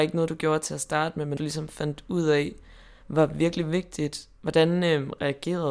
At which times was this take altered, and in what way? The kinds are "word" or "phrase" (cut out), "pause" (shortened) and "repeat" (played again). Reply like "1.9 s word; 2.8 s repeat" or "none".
1.4 s word